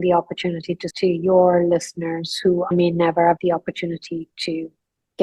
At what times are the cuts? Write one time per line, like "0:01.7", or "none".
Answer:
0:00.9
0:02.7
0:03.4

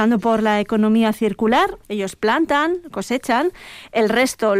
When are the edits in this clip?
0:01.8

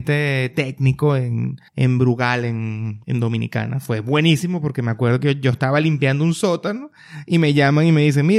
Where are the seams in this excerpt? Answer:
0:01.7
0:03.0

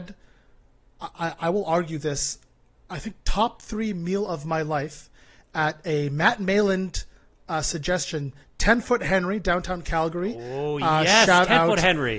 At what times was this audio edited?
none

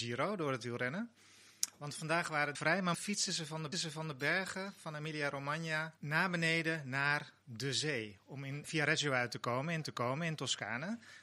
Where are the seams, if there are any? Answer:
0:02.5
0:02.9
0:03.7
0:06.0
0:07.4
0:08.6
0:09.8

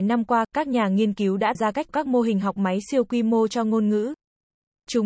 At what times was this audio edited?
0:01.5
0:01.9

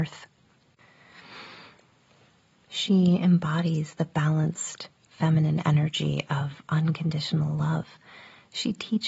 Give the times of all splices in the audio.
none

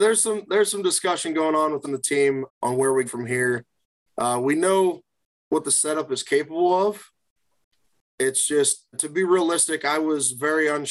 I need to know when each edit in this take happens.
0:01.8
0:02.5
0:03.1
0:08.9

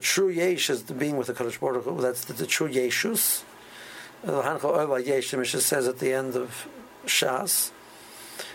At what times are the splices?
none

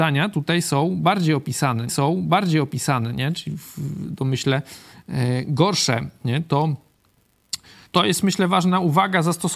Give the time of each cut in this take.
0:01.9
0:07.9

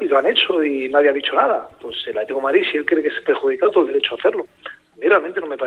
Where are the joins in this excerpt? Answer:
0:03.7

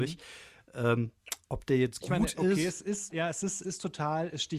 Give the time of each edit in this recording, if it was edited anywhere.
0:02.0
0:03.1
0:03.6

